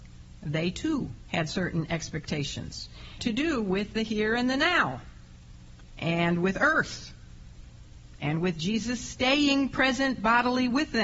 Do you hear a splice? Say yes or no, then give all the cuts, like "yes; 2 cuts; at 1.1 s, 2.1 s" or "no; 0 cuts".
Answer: yes; 1 cut; at 3.2 s